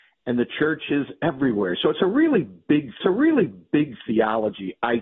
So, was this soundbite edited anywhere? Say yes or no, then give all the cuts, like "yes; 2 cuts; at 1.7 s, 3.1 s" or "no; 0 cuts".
yes; 1 cut; at 3.0 s